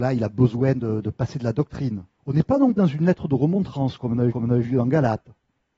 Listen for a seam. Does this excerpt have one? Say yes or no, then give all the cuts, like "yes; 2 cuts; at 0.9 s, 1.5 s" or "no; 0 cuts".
yes; 3 cuts; at 2.2 s, 2.8 s, 4.3 s